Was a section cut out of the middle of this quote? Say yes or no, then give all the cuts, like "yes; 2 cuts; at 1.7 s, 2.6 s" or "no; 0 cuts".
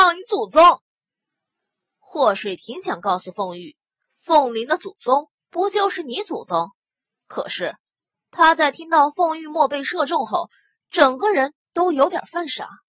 no; 0 cuts